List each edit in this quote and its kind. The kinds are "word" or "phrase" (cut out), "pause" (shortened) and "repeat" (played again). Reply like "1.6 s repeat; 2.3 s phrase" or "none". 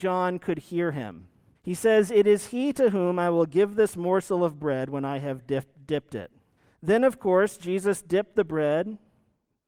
1.6 s pause; 6.6 s pause